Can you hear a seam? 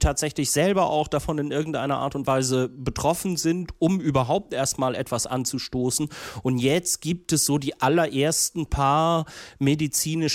no; 0 cuts

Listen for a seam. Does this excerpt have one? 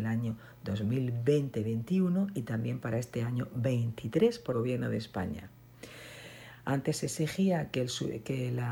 yes; 1 cut; at 4.5 s

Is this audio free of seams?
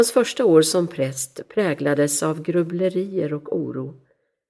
yes; 0 cuts

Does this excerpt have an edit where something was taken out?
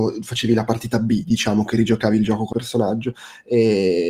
yes; 1 cut; at 2.5 s

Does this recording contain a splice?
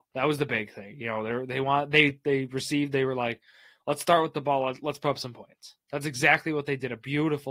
no; 0 cuts

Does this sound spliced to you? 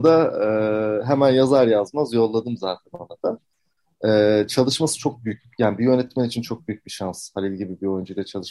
no; 0 cuts

